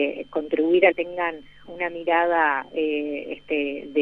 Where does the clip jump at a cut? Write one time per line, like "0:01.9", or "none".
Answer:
0:00.9
0:01.6